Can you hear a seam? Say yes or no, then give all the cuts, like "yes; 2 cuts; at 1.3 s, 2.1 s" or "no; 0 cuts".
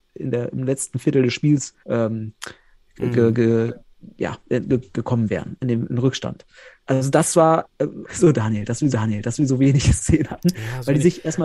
yes; 4 cuts; at 1.8 s, 6.8 s, 8.0 s, 8.9 s